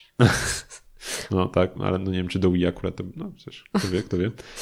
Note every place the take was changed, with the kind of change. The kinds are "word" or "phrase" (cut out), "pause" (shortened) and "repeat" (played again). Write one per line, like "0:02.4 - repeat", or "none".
0:01.8 - word